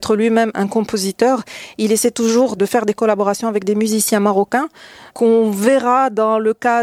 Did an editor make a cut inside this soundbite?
no; 0 cuts

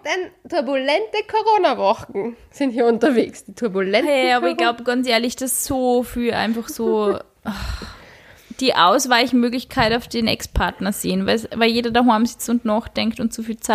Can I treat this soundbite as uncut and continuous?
yes; 0 cuts

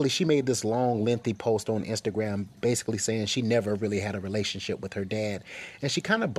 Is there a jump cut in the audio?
no; 0 cuts

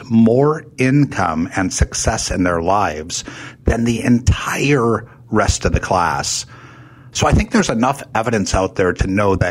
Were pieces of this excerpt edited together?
no; 0 cuts

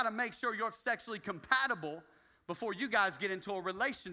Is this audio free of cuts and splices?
yes; 0 cuts

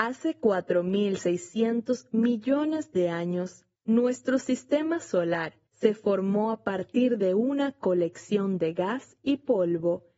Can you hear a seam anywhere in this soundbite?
yes; 2 cuts; at 3.8 s, 5.7 s

